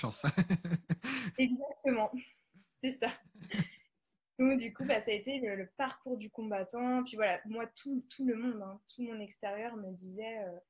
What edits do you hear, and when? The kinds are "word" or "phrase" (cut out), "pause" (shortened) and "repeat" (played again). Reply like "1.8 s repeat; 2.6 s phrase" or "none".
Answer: none